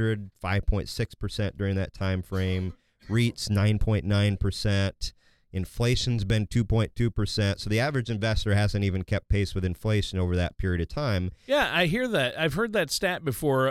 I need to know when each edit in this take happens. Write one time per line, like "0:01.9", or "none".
none